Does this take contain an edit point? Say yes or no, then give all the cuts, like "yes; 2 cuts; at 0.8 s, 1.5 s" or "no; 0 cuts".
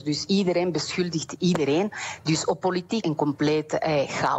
yes; 1 cut; at 3.0 s